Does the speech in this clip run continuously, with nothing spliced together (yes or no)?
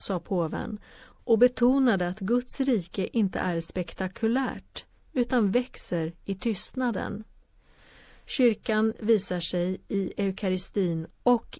yes